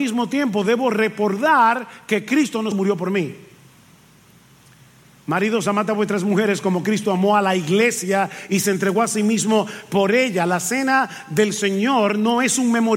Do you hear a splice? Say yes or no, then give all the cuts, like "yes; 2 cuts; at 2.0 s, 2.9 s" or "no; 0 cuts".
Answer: yes; 1 cut; at 2.7 s